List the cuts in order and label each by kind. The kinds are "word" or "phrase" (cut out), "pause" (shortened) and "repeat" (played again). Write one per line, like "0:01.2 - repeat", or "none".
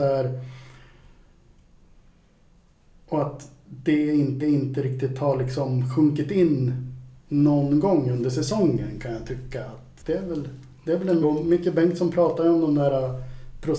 0:04.4 - repeat
0:07.2 - pause
0:10.0 - word
0:11.2 - phrase